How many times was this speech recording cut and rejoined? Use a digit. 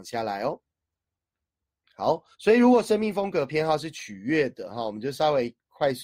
1